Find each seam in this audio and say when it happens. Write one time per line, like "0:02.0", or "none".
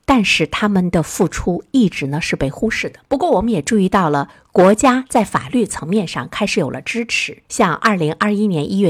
0:03.0
0:07.4